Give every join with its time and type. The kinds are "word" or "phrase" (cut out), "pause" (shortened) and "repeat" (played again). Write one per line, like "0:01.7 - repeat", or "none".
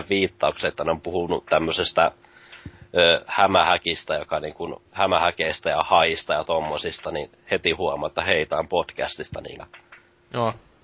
0:04.9 - pause
0:09.6 - word